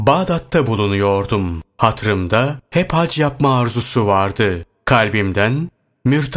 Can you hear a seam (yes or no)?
no